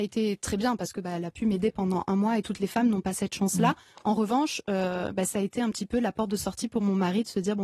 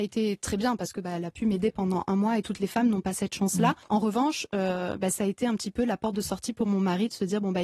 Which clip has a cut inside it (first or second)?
second